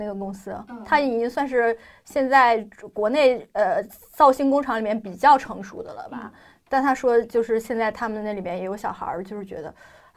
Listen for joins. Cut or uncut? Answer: uncut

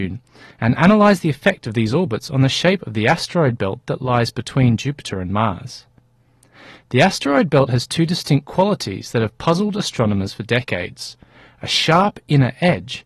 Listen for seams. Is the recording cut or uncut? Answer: uncut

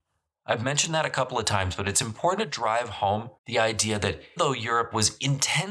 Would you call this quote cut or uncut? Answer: cut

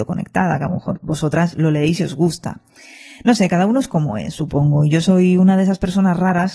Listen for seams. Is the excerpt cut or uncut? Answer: uncut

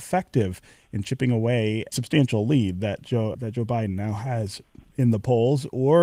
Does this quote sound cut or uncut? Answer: cut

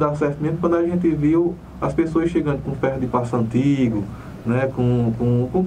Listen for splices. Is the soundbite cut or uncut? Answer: uncut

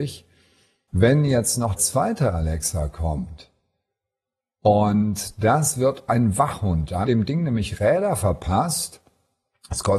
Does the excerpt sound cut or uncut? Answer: cut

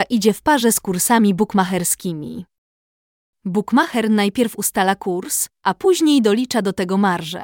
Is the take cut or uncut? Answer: uncut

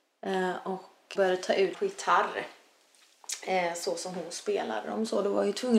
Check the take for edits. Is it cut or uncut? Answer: cut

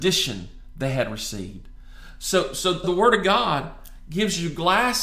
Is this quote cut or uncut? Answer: cut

